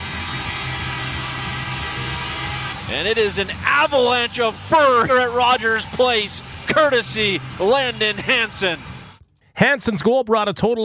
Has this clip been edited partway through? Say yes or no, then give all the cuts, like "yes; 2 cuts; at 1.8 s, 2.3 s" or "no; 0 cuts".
yes; 1 cut; at 5.1 s